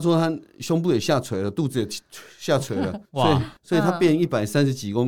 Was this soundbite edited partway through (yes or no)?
yes